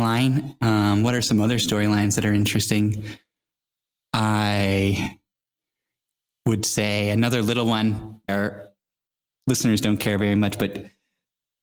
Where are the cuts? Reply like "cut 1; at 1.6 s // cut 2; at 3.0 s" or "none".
cut 1; at 8.3 s